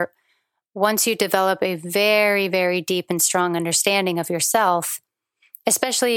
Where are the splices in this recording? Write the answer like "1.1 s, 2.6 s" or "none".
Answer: none